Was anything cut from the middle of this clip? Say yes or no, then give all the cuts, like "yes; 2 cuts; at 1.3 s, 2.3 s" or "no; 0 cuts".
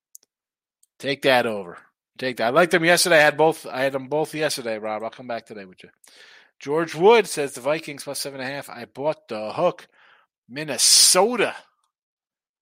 no; 0 cuts